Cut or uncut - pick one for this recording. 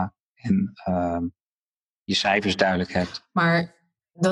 uncut